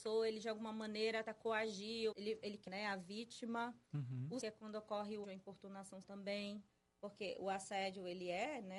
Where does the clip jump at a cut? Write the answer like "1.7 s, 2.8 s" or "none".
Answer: 1.2 s, 2.1 s, 2.7 s, 4.4 s, 5.2 s, 6.0 s